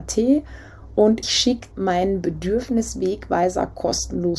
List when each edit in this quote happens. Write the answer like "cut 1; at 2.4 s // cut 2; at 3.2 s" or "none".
cut 1; at 1.2 s // cut 2; at 1.7 s